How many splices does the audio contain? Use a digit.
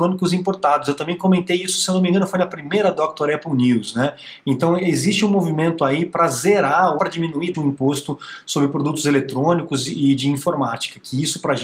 2